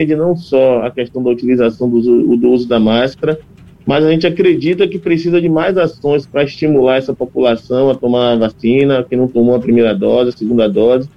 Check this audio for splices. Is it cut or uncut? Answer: uncut